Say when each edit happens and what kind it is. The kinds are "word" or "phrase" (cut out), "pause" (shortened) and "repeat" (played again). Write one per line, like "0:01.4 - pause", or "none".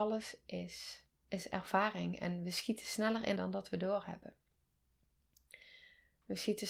0:01.2 - pause
0:03.4 - word